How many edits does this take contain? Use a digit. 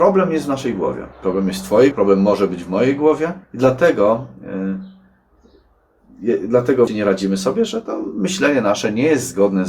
4